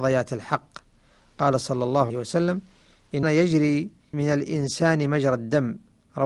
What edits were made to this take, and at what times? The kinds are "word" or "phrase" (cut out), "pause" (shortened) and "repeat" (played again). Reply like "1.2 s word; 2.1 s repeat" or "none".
2.1 s word; 3.2 s word; 4.1 s word